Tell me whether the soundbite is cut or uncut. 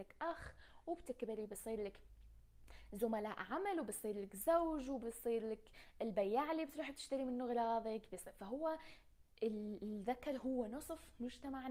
uncut